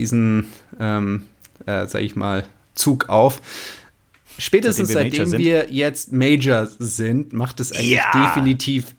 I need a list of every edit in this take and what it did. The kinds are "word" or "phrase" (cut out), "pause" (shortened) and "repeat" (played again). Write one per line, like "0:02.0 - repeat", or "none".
none